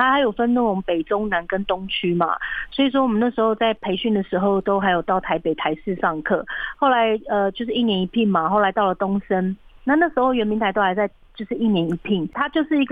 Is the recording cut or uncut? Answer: uncut